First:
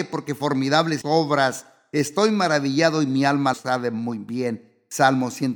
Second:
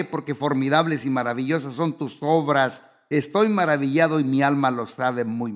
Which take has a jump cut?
first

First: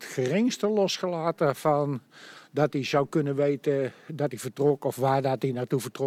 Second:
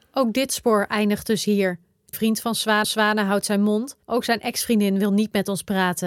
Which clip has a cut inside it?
second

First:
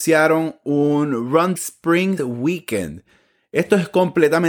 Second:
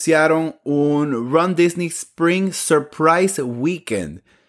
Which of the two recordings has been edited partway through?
first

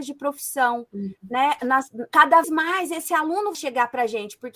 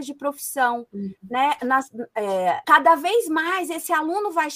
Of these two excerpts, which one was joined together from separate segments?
first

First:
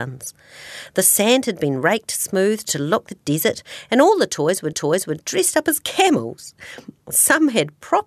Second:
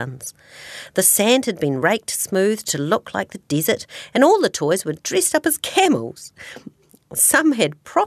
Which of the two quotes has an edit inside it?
first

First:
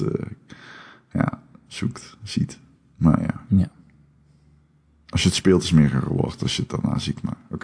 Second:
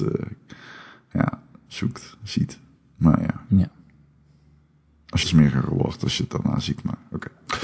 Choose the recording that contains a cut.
second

